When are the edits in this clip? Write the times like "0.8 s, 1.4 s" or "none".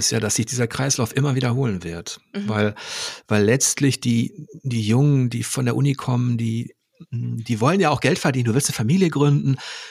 none